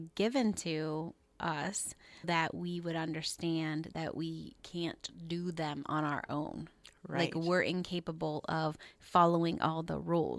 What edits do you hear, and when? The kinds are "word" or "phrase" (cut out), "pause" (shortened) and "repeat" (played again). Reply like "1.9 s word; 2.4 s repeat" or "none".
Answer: 2.2 s word; 4.6 s pause; 7.0 s pause